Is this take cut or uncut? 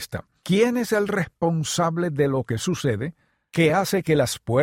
uncut